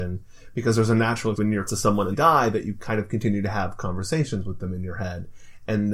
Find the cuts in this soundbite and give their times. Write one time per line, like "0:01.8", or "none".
0:01.3
0:01.7
0:02.1